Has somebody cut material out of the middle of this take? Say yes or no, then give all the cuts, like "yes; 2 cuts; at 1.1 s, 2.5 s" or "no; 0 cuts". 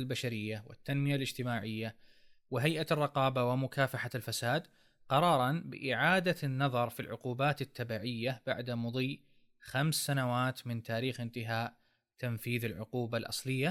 no; 0 cuts